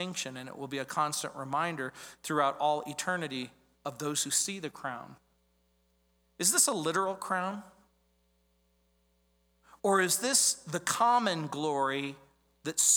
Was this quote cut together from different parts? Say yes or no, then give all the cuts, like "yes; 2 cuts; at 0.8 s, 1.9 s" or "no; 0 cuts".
no; 0 cuts